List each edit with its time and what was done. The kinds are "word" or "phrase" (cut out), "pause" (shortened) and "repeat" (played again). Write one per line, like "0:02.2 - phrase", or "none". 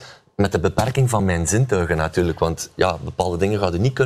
none